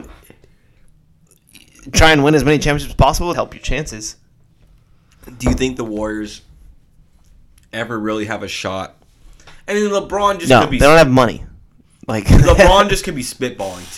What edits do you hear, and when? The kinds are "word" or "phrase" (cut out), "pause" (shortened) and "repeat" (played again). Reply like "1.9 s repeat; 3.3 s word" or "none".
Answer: 3.3 s phrase